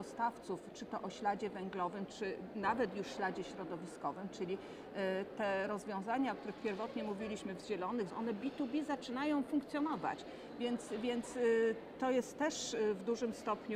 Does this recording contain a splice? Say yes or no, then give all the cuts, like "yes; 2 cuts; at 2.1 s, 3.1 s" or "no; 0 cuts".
yes; 1 cut; at 8.1 s